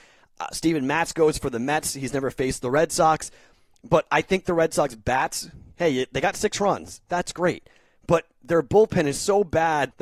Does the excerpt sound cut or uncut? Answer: uncut